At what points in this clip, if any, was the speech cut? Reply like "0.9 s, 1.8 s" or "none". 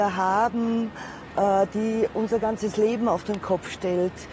none